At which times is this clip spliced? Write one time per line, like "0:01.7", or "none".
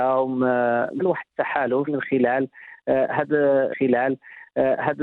0:01.0
0:01.9
0:03.7